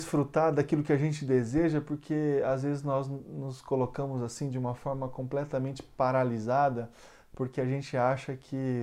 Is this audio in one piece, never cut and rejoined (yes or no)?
yes